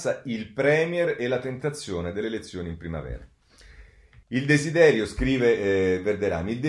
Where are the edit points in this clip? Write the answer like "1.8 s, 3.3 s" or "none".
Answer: 4.2 s